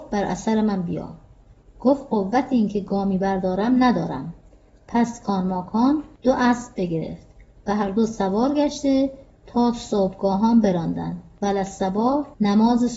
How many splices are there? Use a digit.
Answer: 0